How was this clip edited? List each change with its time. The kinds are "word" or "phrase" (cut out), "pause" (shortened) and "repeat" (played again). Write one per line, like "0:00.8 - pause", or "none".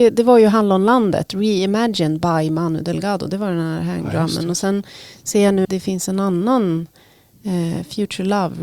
0:05.6 - word